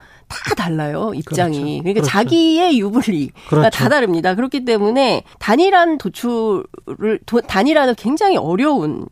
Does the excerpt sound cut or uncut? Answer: cut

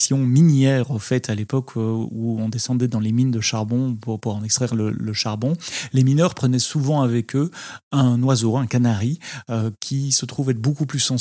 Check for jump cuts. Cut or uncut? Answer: uncut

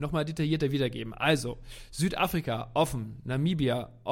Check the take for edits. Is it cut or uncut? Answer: uncut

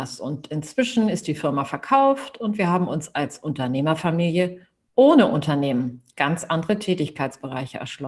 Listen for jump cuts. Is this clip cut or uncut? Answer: uncut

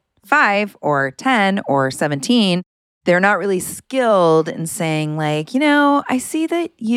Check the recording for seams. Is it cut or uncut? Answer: uncut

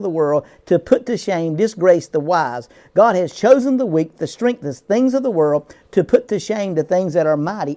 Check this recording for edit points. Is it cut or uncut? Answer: uncut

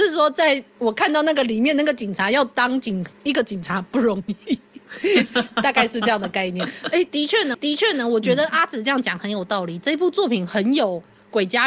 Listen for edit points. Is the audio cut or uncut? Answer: cut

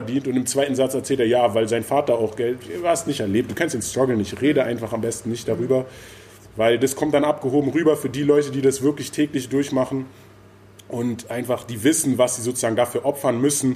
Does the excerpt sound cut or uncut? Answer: uncut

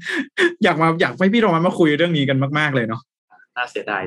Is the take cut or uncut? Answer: uncut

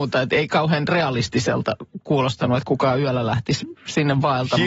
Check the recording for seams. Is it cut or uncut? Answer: uncut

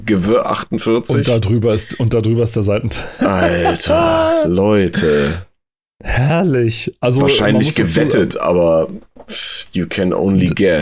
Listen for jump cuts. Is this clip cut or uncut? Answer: uncut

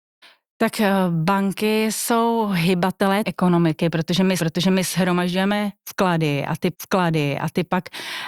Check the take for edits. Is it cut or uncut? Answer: cut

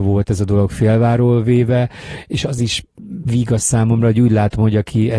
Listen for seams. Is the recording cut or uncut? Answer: uncut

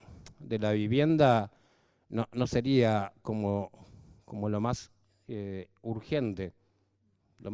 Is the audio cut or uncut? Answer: uncut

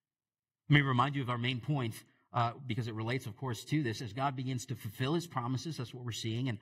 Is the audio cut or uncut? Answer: uncut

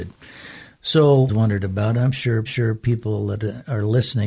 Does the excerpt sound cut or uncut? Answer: cut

